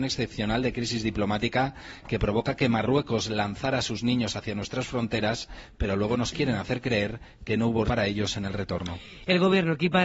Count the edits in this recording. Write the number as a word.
one